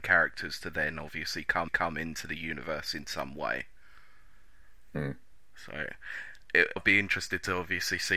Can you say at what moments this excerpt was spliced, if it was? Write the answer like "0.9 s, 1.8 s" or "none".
1.7 s, 6.8 s